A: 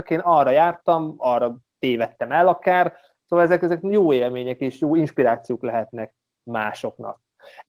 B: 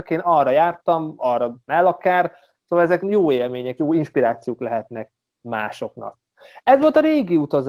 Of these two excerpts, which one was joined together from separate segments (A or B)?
B